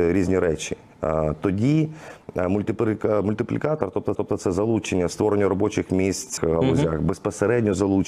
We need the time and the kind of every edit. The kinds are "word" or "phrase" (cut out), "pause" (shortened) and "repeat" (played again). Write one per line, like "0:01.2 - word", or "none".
0:04.1 - repeat
0:05.1 - word
0:06.4 - phrase